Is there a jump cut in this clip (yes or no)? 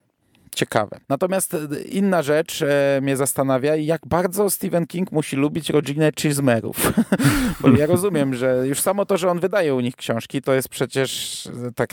yes